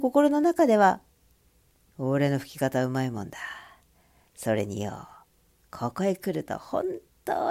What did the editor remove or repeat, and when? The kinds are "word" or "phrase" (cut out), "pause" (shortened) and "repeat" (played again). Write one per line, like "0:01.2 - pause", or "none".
none